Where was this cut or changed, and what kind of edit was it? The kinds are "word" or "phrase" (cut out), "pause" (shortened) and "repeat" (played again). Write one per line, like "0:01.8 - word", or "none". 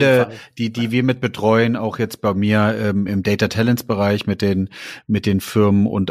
0:03.1 - word